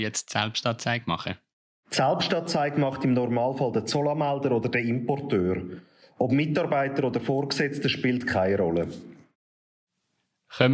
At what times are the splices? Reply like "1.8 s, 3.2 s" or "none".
none